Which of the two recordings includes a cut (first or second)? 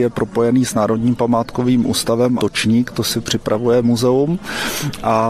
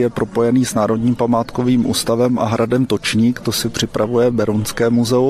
first